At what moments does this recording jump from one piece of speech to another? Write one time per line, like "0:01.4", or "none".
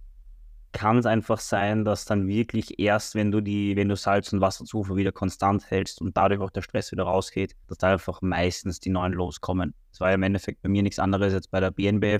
0:07.6